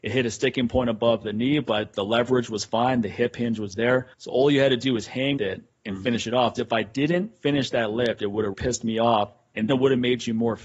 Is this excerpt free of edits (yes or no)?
no